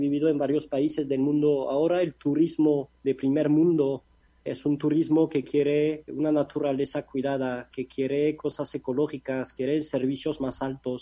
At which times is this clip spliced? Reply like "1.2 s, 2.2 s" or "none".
4.5 s, 6.1 s